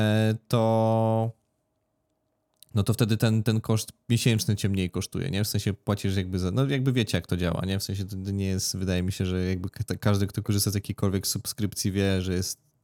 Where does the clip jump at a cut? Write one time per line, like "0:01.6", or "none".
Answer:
none